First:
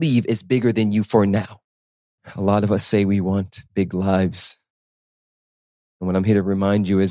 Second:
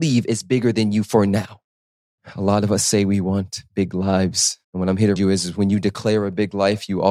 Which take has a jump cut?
second; 2 cuts; at 4.6 s, 5.2 s

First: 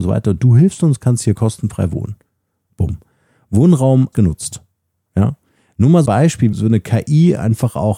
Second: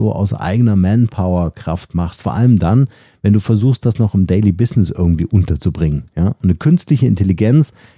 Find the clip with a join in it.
first; 3 cuts; at 4.1 s, 6.1 s, 6.5 s

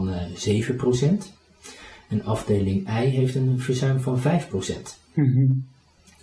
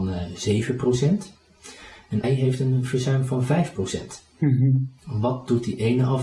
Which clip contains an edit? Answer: second; 2 cuts; at 2.2 s, 5.0 s

